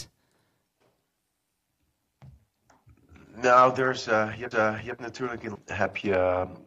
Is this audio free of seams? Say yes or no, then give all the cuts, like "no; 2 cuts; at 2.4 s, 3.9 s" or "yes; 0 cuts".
no; 2 cuts; at 4.5 s, 5.5 s